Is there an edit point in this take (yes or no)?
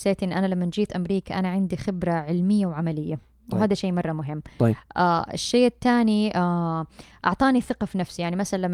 no